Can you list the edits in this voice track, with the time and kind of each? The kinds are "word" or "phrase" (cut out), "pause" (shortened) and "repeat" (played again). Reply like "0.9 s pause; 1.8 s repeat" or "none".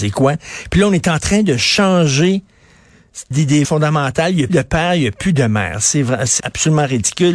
3.3 s word; 3.6 s word; 4.5 s word; 6.4 s word